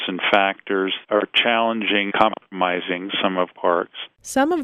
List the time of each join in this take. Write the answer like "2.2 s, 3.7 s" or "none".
1.0 s, 2.1 s, 3.5 s